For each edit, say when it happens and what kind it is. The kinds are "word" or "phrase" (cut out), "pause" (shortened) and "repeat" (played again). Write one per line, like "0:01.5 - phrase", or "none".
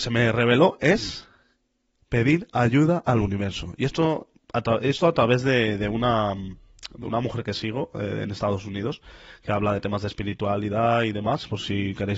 none